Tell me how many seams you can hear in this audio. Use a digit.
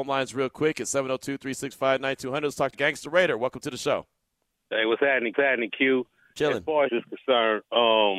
3